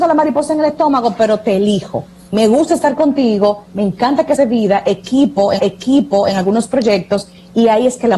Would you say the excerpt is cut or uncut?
cut